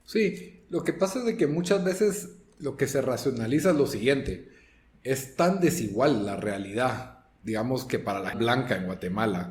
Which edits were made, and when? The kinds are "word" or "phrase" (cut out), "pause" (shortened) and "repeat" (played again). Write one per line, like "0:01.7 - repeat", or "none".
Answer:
0:08.3 - phrase